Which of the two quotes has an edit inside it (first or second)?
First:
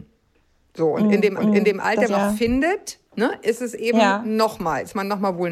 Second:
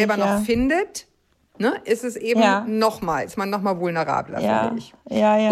first